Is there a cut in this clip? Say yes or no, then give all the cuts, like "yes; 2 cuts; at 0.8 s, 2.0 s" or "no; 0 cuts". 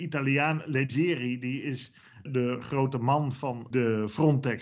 yes; 2 cuts; at 2.3 s, 3.7 s